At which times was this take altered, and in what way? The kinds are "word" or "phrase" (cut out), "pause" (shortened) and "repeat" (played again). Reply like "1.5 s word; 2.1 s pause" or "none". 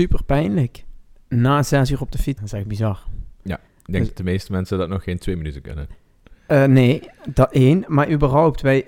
2.4 s word; 3.7 s pause

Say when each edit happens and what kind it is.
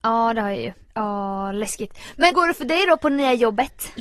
2.3 s word

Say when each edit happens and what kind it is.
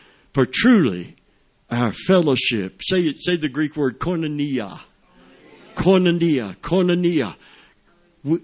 none

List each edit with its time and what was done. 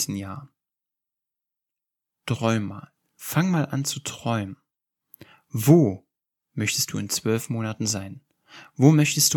none

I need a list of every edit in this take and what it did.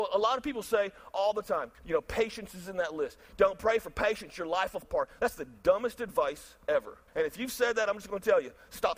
1.7 s pause; 4.8 s word; 7.1 s pause

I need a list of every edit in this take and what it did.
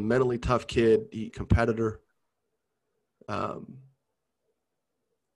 1.3 s phrase

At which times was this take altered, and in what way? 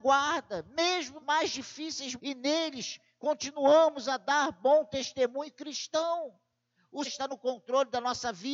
1.2 s word; 2.2 s phrase; 7.0 s word

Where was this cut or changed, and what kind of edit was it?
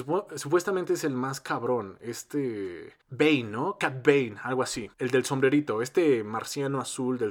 3.0 s pause; 4.9 s pause

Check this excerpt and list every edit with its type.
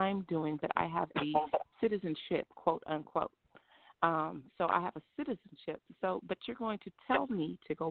1.7 s pause; 4.5 s pause

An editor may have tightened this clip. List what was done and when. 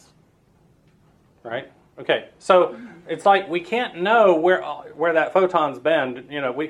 none

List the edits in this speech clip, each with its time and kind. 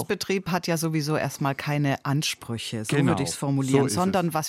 none

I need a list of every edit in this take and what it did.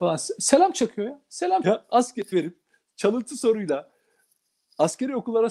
1.6 s word; 2.3 s phrase

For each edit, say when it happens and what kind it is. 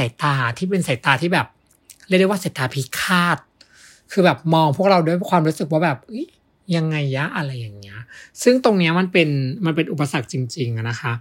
none

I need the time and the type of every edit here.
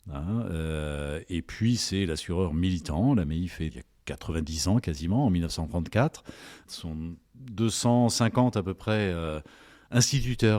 3.7 s word; 6.7 s word

